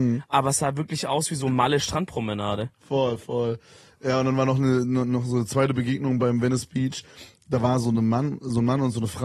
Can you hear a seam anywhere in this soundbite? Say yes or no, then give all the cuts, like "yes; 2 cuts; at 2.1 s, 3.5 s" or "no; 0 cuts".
no; 0 cuts